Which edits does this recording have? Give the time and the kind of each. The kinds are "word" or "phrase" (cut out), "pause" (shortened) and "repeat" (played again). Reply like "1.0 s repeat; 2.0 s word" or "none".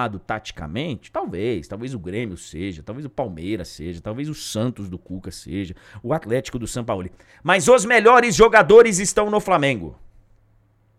none